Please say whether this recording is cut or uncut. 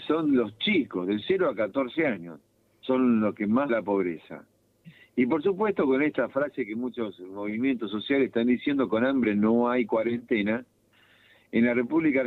cut